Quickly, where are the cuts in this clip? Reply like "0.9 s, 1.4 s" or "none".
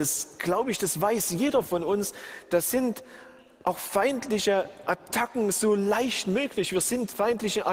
none